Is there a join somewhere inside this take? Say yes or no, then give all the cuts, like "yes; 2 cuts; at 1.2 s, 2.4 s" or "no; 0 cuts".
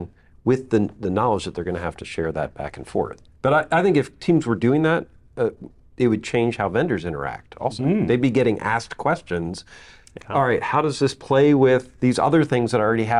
no; 0 cuts